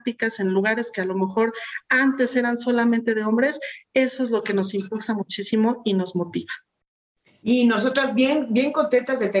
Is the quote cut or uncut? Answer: uncut